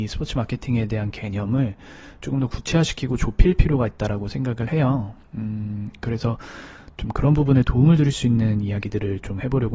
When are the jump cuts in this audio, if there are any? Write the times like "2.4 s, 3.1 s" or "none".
none